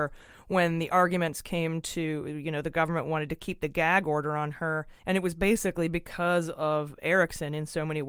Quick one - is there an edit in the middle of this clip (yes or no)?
yes